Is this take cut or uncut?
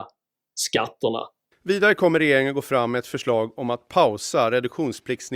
uncut